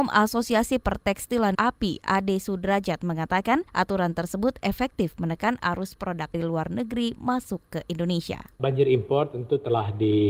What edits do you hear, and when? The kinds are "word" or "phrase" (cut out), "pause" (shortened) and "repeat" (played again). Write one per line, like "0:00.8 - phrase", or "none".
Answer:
0:01.5 - word
0:03.7 - pause
0:06.3 - phrase